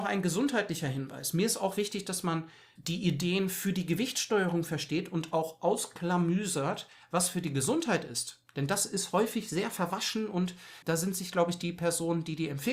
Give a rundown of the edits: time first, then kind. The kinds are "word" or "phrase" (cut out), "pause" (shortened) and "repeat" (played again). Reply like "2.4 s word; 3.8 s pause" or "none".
2.8 s word; 10.8 s word